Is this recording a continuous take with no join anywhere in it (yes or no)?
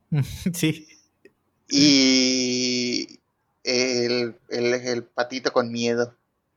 yes